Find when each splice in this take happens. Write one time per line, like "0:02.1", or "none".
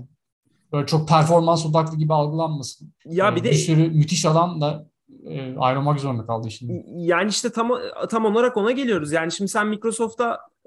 0:03.0